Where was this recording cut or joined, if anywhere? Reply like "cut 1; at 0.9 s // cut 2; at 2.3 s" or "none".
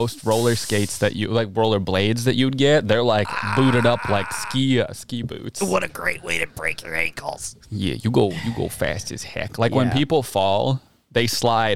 none